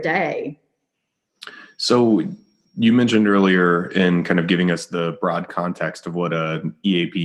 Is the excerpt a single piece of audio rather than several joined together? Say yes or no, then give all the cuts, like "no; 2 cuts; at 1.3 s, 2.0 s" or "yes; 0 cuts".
yes; 0 cuts